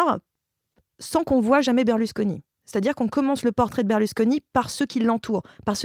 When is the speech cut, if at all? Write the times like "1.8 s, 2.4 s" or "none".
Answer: none